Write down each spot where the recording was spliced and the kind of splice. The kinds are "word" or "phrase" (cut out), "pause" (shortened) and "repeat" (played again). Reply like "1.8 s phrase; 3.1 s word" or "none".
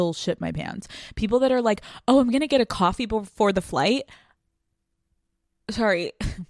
none